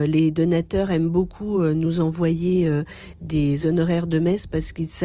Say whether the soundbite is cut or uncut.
uncut